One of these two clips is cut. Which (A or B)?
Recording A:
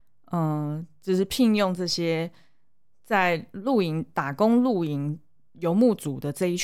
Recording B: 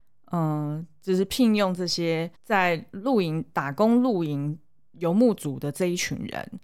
B